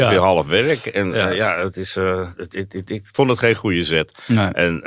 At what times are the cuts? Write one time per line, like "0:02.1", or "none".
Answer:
none

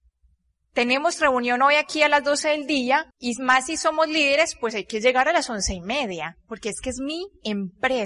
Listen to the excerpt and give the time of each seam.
0:03.1

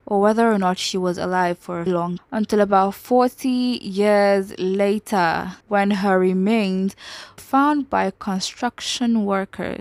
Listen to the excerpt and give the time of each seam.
0:01.9
0:02.2
0:05.6
0:07.4

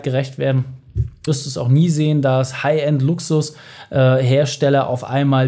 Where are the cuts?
0:01.3

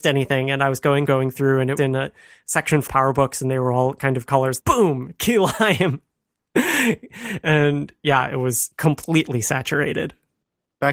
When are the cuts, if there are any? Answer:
0:01.1
0:01.8
0:02.9
0:04.3
0:04.6
0:08.7

